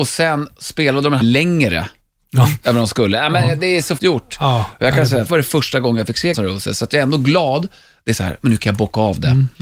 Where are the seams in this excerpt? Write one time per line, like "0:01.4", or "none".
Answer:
0:01.2
0:04.0
0:05.3
0:06.3

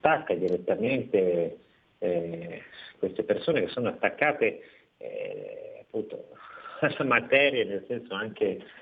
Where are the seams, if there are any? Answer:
none

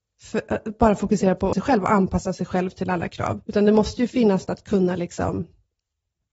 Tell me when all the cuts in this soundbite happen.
0:01.5
0:03.4
0:04.4

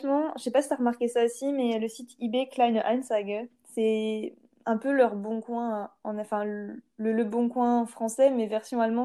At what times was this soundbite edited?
none

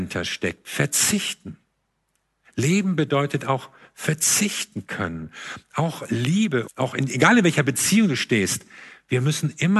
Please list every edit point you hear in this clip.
0:06.7

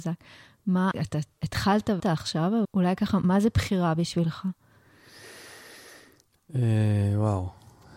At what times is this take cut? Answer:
0:00.9
0:02.0
0:02.6
0:03.2

